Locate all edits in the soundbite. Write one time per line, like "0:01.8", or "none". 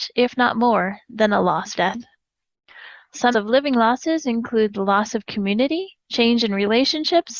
0:01.8
0:03.3
0:06.0